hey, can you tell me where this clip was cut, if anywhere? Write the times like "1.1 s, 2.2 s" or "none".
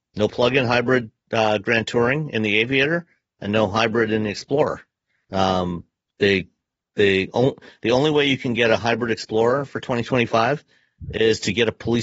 none